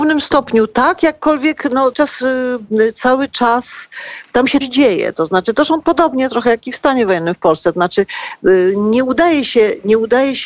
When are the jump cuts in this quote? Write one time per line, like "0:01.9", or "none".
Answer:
0:01.9
0:04.6